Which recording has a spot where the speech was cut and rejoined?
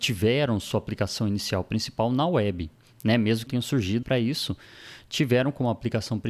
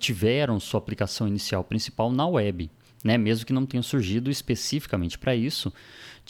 first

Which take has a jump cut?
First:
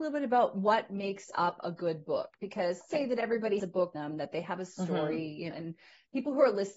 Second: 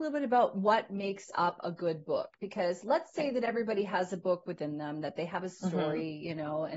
first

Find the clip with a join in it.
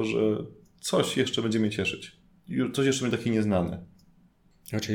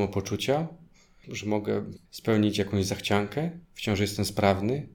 second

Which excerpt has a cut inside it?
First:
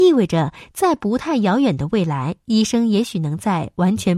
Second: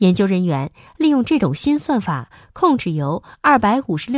first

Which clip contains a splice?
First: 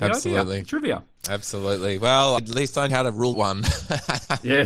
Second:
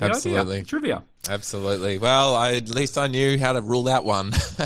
first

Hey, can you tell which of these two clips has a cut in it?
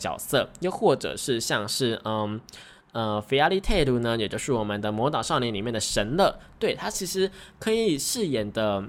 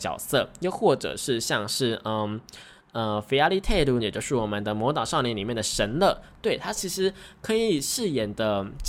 second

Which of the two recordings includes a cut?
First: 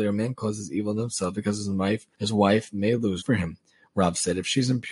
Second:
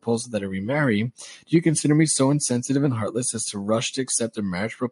first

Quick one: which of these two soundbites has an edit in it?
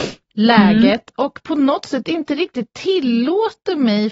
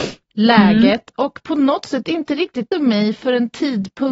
second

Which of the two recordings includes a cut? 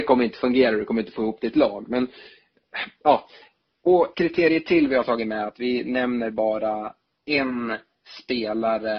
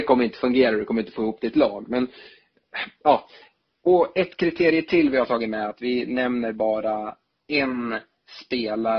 first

